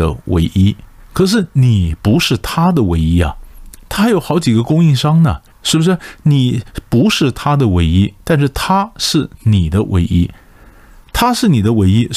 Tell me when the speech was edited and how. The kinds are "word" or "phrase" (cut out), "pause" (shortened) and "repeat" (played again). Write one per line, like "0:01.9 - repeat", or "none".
0:01.0 - pause
0:05.5 - pause